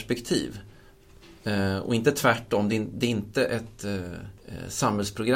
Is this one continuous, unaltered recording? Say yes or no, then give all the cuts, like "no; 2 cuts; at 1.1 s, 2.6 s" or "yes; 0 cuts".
yes; 0 cuts